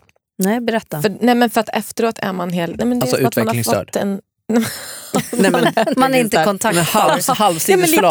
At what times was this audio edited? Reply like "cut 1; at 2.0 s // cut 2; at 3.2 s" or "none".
cut 1; at 5.9 s